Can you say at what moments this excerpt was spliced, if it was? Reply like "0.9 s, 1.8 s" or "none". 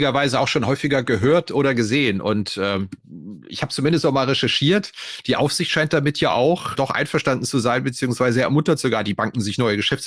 6.7 s